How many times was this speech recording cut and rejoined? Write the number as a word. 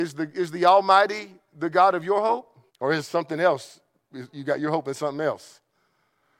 one